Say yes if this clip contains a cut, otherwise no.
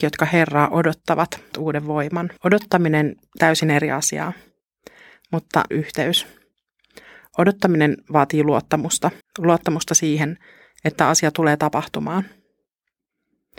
yes